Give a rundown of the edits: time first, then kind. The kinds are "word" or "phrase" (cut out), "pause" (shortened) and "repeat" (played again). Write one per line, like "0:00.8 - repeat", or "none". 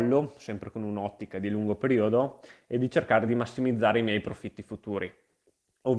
none